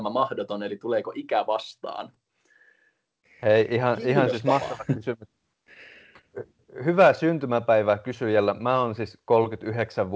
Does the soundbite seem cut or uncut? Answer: uncut